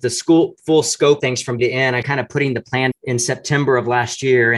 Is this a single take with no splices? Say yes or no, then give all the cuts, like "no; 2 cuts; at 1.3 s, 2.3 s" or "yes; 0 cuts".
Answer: no; 4 cuts; at 1.2 s, 1.6 s, 2.0 s, 2.9 s